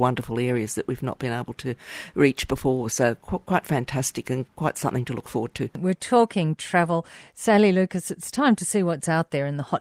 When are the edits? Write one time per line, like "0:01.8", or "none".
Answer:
none